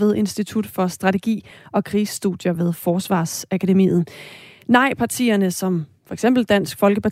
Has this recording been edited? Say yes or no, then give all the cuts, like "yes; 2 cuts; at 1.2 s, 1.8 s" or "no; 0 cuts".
no; 0 cuts